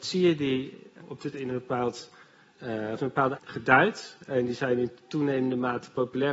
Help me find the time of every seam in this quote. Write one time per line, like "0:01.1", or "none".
0:01.0
0:01.3
0:03.0
0:03.4